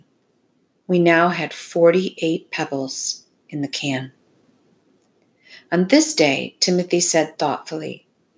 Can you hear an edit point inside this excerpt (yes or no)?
no